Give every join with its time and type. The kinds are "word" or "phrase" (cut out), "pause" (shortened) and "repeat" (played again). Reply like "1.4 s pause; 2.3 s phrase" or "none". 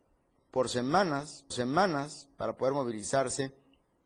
1.5 s repeat